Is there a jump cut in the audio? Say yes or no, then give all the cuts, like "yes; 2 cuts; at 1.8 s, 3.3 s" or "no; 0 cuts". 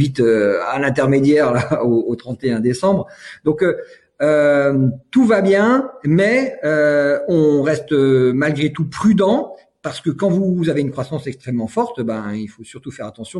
no; 0 cuts